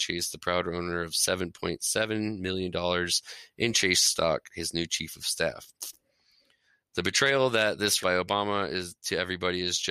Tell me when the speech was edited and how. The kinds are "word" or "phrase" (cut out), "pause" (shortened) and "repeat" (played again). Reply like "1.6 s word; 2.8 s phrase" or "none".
8.0 s word